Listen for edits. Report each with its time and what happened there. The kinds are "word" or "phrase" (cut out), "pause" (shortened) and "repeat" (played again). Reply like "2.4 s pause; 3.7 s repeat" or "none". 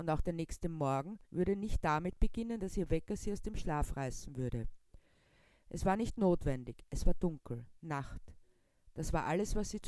1.2 s pause; 7.8 s pause